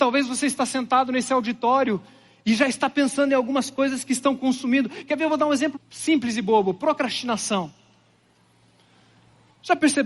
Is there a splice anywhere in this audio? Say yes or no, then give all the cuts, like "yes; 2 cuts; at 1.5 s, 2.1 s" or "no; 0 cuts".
yes; 1 cut; at 5.7 s